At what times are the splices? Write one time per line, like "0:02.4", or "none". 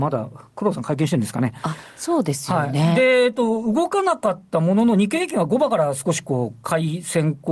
none

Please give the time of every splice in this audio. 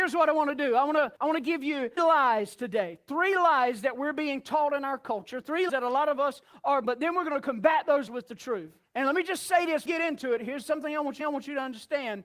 0:01.2
0:02.0
0:05.7
0:06.8
0:08.1
0:08.9
0:09.9
0:11.2

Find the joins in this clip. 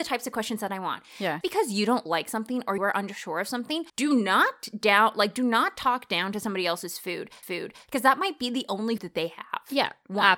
0:01.4
0:02.8
0:03.9
0:07.4
0:09.0

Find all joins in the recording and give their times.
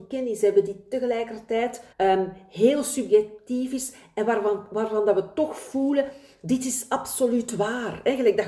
0:01.9

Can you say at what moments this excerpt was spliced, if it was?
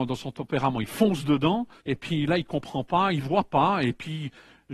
0:01.8

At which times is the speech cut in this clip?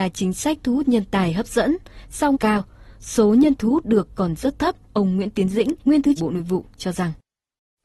0:02.3
0:03.6
0:04.8
0:05.8
0:06.2

